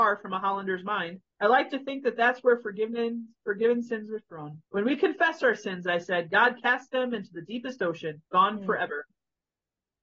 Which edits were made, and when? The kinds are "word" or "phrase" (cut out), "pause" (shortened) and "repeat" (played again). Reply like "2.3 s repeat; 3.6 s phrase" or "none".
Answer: 1.3 s pause; 4.7 s pause; 8.3 s pause